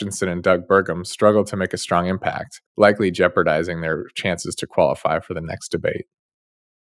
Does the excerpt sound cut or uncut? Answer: cut